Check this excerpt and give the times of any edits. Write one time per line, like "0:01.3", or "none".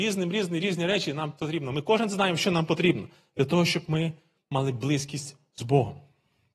none